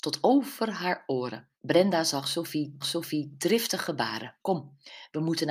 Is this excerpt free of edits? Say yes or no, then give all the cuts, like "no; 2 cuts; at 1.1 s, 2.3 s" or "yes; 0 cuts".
no; 3 cuts; at 1.6 s, 2.8 s, 4.4 s